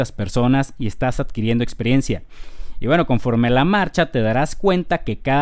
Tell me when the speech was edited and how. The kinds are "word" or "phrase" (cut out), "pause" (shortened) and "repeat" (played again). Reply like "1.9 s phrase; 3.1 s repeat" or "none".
none